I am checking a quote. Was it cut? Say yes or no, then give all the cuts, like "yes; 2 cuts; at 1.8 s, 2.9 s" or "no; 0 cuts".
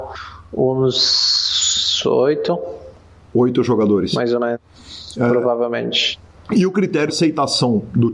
yes; 1 cut; at 7.1 s